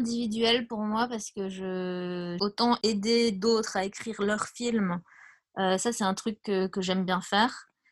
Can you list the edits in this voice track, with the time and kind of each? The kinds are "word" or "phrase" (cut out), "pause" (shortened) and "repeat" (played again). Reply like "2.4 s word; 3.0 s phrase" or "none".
none